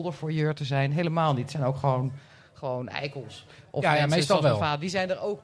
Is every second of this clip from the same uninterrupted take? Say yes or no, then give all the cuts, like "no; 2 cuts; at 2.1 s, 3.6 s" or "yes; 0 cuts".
yes; 0 cuts